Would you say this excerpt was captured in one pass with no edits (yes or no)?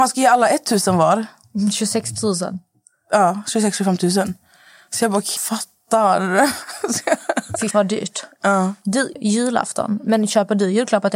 no